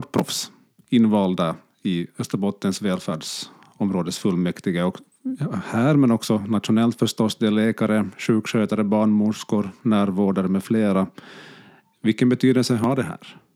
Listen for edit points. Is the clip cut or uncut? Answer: uncut